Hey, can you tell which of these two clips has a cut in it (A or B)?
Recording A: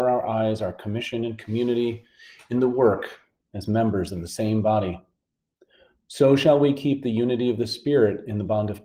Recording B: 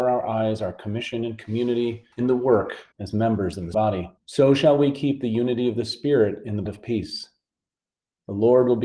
B